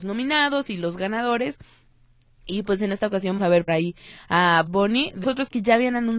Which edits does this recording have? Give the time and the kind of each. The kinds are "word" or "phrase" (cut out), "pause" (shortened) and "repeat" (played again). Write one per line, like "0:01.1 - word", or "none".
0:03.4 - word
0:03.7 - word
0:04.7 - word
0:05.2 - word